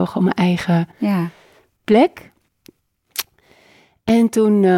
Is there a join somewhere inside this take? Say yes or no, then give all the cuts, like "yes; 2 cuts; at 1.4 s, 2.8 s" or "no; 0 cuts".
no; 0 cuts